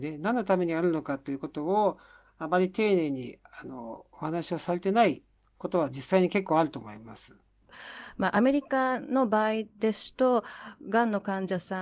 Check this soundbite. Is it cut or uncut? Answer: uncut